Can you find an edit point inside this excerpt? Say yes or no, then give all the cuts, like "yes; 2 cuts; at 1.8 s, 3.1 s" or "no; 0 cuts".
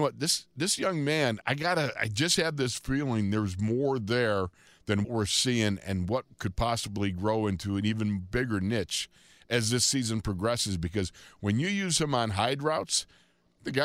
yes; 2 cuts; at 1.4 s, 5.0 s